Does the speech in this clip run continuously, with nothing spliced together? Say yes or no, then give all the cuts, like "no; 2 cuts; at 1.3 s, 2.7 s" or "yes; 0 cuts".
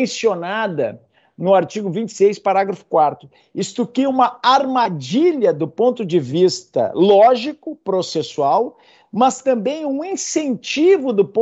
yes; 0 cuts